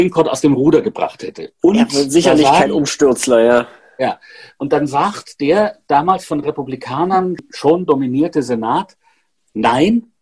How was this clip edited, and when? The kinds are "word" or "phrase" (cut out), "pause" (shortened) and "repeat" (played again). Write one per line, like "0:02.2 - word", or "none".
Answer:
none